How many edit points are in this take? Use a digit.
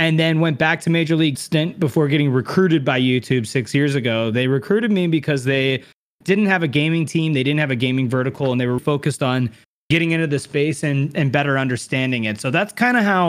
2